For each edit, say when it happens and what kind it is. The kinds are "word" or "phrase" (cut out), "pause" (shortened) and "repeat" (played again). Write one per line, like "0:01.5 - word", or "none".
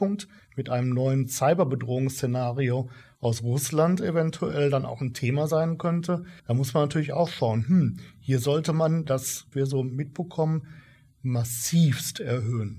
0:06.4 - pause
0:09.5 - phrase